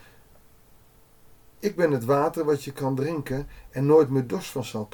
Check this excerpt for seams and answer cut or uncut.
uncut